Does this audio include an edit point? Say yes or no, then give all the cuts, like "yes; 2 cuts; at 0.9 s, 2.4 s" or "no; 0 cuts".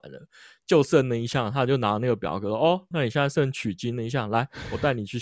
yes; 1 cut; at 2.9 s